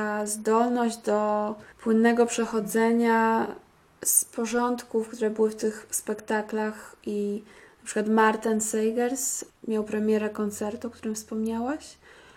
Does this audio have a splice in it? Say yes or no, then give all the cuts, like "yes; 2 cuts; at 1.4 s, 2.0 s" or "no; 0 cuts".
yes; 1 cut; at 1.7 s